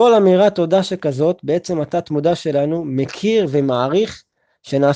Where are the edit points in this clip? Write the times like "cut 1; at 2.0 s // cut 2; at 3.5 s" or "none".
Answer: none